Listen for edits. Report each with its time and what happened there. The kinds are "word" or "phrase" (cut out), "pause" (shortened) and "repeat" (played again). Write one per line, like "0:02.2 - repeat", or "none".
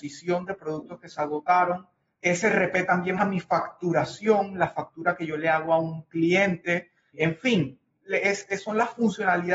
0:03.2 - word